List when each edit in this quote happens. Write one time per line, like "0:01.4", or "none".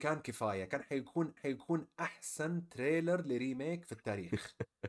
0:01.4